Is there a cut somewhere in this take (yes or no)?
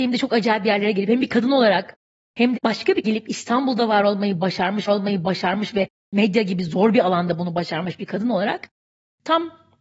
yes